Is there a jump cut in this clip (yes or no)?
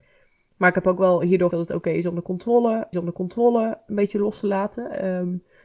yes